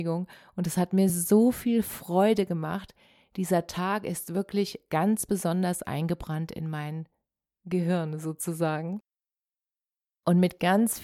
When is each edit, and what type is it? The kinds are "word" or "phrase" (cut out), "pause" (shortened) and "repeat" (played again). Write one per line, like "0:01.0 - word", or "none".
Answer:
none